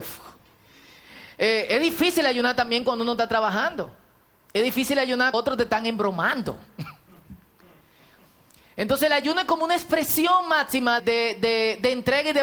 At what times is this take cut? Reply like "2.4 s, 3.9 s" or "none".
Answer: 5.3 s, 11.0 s

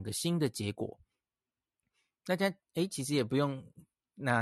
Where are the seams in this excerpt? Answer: none

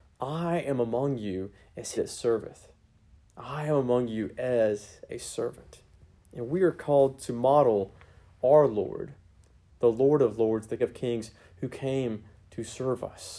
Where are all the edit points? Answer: 2.0 s, 10.8 s

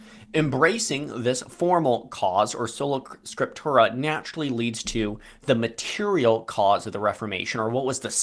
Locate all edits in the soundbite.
none

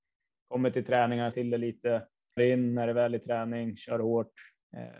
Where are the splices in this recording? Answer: 1.3 s, 2.4 s

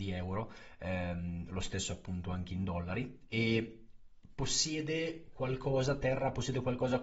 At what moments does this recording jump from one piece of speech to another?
none

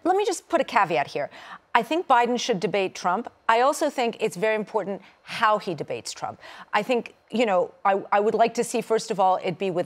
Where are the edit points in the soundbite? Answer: 7.2 s

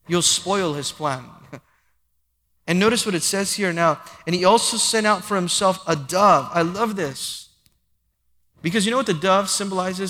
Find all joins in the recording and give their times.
none

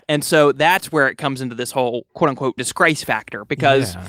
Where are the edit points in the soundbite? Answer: 2.6 s

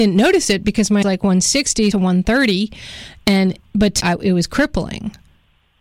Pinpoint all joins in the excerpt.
1.0 s, 1.9 s, 4.0 s

